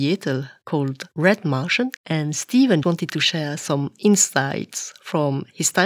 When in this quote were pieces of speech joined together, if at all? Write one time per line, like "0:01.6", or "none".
0:01.1
0:02.0
0:02.8